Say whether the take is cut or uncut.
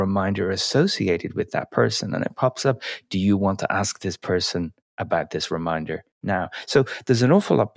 uncut